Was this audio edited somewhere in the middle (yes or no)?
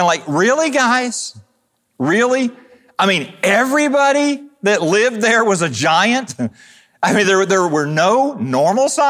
no